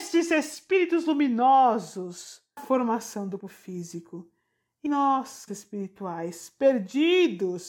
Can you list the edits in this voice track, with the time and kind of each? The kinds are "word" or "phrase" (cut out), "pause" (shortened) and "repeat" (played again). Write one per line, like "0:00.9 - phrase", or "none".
0:02.6 - word
0:03.4 - word
0:04.9 - word
0:05.5 - word